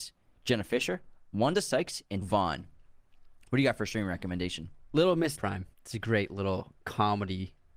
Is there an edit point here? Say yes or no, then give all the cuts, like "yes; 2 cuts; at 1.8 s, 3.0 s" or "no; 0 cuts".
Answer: yes; 3 cuts; at 2.2 s, 5.3 s, 5.7 s